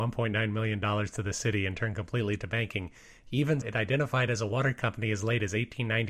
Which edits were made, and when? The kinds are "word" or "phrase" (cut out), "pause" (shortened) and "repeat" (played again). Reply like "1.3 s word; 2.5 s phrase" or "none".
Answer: 3.6 s word